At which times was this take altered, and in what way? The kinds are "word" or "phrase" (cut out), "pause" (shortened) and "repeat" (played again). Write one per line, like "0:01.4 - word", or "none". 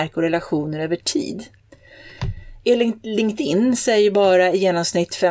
none